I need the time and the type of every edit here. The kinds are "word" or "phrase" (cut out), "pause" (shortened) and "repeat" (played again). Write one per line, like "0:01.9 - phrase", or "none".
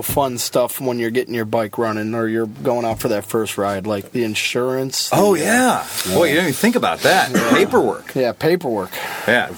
none